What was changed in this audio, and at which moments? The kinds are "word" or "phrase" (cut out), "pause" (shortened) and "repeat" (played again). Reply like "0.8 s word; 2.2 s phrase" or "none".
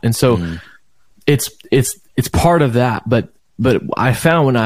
2.1 s pause